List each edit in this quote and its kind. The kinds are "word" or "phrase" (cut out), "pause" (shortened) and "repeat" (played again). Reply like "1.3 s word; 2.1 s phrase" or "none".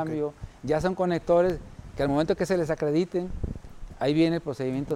none